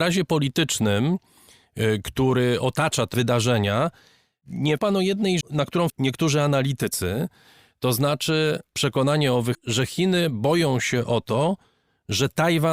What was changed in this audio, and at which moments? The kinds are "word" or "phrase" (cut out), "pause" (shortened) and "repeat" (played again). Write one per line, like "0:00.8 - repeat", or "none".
0:03.1 - word
0:04.8 - word
0:05.4 - word
0:05.9 - word
0:08.7 - word
0:09.5 - word